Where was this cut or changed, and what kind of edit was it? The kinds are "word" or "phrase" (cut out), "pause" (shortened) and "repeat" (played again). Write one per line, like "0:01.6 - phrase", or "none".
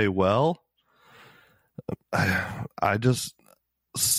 0:02.0 - pause